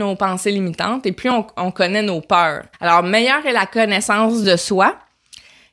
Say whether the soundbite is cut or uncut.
cut